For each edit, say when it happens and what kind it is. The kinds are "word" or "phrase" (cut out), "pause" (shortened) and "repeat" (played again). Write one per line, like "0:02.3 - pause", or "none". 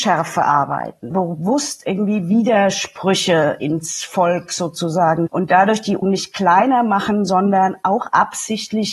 0:01.1 - word
0:05.3 - word
0:06.0 - word